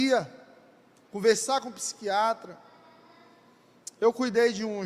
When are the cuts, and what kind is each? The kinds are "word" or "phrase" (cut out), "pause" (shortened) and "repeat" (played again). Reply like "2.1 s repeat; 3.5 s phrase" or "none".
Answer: none